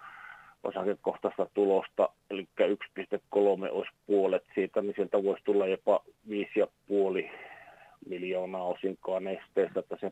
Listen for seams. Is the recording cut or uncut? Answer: uncut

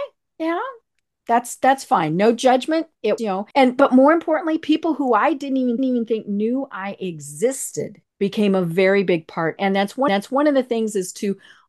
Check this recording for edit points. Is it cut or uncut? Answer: cut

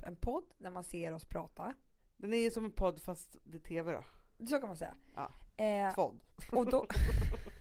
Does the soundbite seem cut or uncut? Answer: uncut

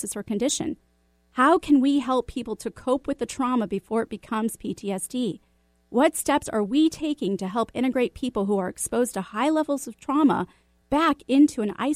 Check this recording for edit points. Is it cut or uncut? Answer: uncut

